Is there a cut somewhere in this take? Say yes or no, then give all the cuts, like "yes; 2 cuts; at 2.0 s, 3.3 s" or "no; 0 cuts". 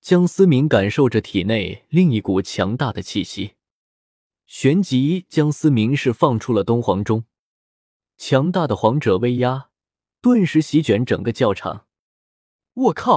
no; 0 cuts